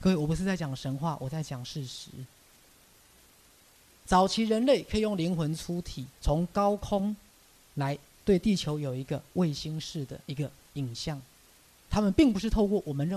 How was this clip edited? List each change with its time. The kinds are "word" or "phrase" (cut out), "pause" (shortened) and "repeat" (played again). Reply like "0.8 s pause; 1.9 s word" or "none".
6.1 s pause; 10.2 s pause